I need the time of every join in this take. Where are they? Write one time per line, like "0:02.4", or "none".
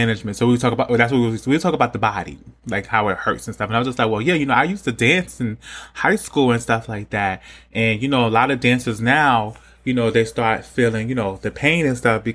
none